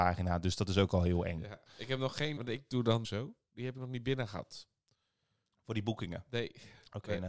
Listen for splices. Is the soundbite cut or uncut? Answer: cut